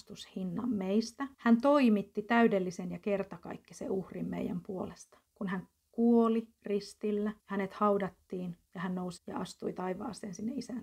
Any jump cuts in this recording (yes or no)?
yes